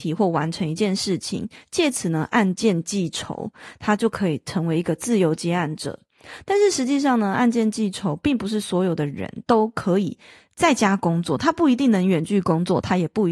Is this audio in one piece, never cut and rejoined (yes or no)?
yes